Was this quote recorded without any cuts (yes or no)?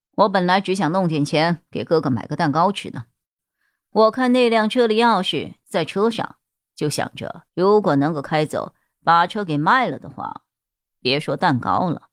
no